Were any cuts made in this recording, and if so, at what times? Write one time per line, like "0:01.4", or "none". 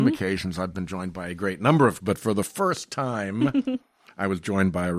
0:02.0